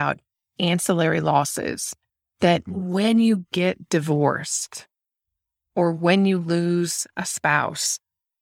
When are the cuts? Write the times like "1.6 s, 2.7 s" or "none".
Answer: none